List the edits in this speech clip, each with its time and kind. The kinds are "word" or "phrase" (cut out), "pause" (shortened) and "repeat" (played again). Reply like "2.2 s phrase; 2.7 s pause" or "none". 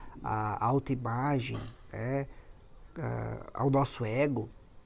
2.9 s pause